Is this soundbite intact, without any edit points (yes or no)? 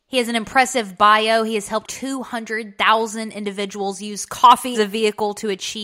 no